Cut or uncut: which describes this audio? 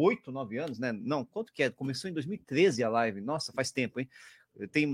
uncut